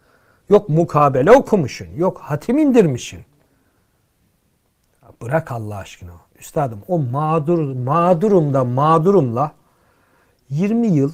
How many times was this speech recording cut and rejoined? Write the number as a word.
zero